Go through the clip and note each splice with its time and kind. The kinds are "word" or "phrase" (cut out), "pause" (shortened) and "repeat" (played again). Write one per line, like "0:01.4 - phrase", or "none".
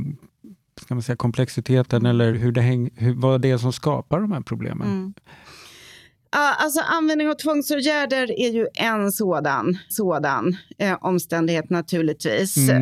0:02.3 - word
0:09.9 - repeat